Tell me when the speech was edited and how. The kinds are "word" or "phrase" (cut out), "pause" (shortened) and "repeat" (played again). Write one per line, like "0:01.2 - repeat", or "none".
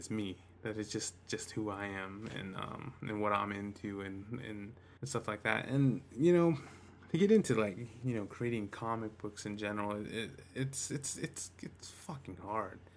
0:05.0 - pause